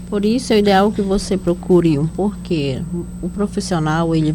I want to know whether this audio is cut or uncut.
cut